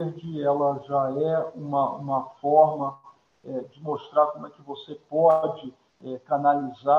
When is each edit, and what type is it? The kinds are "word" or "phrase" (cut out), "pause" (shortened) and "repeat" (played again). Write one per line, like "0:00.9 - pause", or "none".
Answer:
none